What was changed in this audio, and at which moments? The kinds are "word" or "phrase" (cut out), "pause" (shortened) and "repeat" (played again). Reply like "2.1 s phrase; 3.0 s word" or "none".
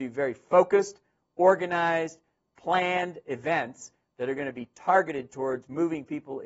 none